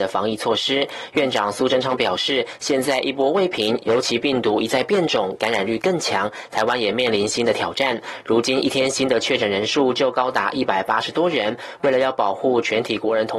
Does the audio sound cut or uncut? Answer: cut